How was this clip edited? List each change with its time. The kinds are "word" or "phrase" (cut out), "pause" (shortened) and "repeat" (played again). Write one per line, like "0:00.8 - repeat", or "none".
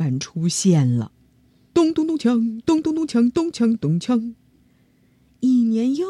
0:01.7 - phrase